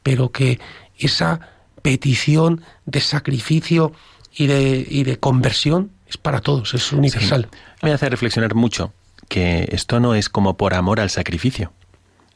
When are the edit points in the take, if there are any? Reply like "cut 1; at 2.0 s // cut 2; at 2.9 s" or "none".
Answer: cut 1; at 7.8 s